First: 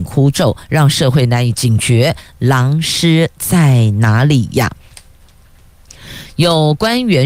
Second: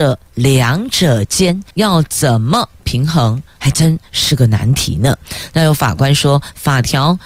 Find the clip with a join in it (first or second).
second